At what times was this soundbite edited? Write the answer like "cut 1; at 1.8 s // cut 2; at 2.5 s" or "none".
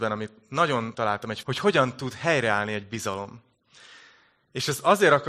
cut 1; at 0.9 s // cut 2; at 1.4 s